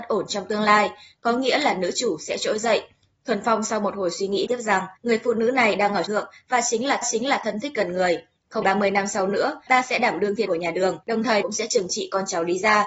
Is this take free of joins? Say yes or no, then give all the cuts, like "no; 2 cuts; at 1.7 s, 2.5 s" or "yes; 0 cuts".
no; 9 cuts; at 4.5 s, 5.0 s, 6.1 s, 7.0 s, 8.6 s, 9.7 s, 10.5 s, 11.0 s, 11.4 s